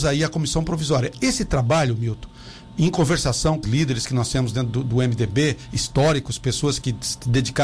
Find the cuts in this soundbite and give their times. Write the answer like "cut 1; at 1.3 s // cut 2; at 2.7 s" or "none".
cut 1; at 3.6 s

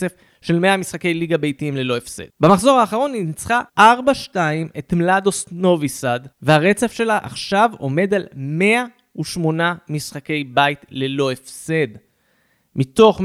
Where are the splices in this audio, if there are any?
cut 1; at 2.3 s // cut 2; at 3.7 s // cut 3; at 6.3 s

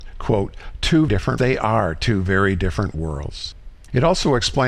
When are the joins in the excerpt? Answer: cut 1; at 1.1 s // cut 2; at 1.4 s

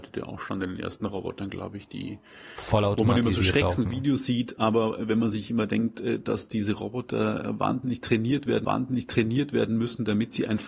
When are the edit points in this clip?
cut 1; at 8.6 s

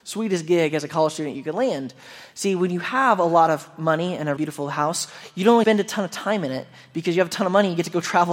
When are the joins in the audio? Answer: cut 1; at 4.4 s // cut 2; at 5.6 s

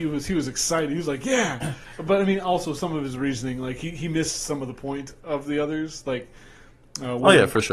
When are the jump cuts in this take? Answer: none

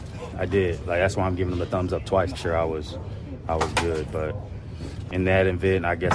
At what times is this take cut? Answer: cut 1; at 2.3 s // cut 2; at 5.1 s

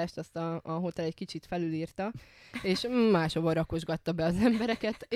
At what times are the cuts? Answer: none

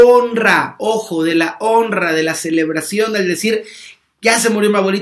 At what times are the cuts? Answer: none

